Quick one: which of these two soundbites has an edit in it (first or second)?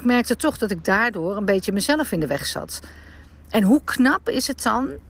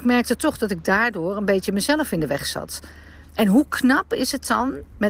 second